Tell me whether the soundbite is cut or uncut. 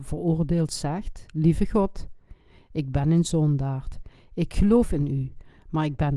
uncut